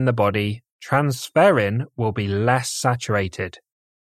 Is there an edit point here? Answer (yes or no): no